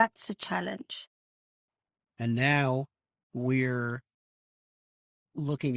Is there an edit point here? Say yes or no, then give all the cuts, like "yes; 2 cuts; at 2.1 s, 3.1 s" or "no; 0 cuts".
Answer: no; 0 cuts